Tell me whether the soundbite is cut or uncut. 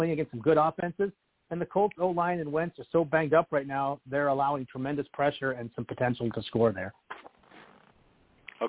uncut